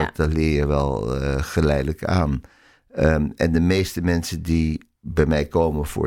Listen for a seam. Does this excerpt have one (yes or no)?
no